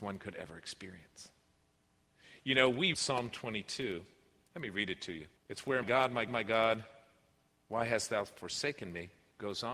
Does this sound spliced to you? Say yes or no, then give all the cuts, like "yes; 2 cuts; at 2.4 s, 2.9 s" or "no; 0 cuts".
yes; 4 cuts; at 2.9 s, 5.4 s, 5.8 s, 6.3 s